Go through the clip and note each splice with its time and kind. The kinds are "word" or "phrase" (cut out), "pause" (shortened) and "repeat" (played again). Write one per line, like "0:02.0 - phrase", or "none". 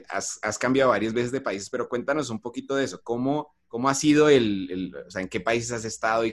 0:03.6 - pause